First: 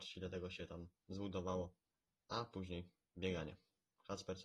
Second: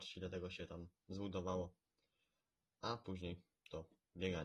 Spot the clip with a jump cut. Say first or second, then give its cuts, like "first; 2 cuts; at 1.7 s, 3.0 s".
first; 2 cuts; at 1.9 s, 3.0 s